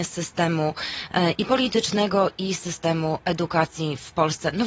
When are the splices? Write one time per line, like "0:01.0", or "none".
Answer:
none